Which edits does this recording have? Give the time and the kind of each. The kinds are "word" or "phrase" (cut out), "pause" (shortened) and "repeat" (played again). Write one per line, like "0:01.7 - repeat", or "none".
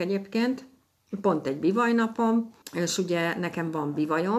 0:02.6 - pause